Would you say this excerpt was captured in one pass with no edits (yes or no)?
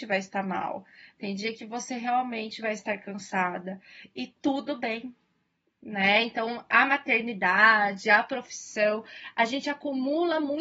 yes